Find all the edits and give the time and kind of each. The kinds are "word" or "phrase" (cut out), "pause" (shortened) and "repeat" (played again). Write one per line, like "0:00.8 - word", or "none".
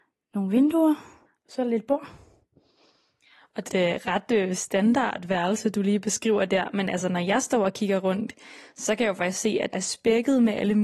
0:01.3 - pause
0:03.7 - phrase
0:09.7 - word